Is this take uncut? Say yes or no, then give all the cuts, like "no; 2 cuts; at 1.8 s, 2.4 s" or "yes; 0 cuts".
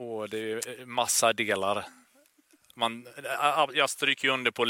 yes; 0 cuts